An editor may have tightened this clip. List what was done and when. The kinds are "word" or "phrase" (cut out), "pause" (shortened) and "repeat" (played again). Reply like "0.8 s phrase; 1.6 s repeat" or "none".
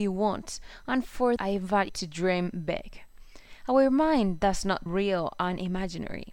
1.4 s word; 1.9 s word; 4.9 s phrase